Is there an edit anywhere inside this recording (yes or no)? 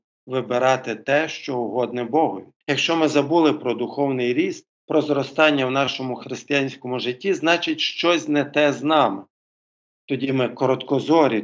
yes